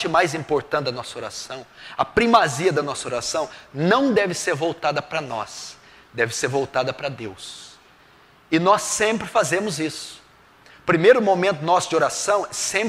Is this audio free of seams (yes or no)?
yes